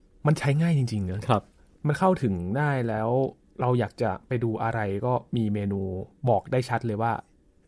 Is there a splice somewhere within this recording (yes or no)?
no